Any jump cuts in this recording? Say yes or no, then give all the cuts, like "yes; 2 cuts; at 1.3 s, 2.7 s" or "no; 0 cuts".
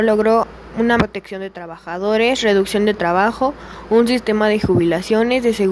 yes; 1 cut; at 1.0 s